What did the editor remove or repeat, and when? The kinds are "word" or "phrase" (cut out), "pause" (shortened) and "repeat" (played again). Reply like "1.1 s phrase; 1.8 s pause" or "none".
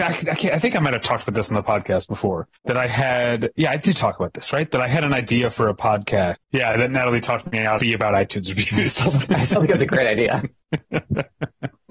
2.6 s pause; 6.3 s word; 7.8 s phrase